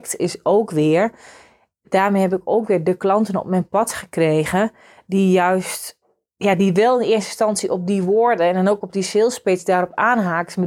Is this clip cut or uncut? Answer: uncut